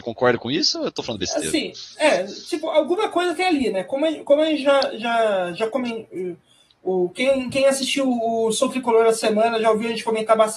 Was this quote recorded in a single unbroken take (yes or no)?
yes